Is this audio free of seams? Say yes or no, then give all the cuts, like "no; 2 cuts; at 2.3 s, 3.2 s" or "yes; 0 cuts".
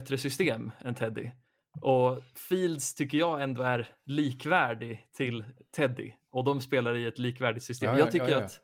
yes; 0 cuts